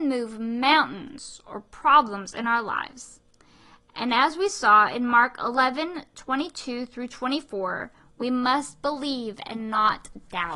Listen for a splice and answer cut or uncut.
uncut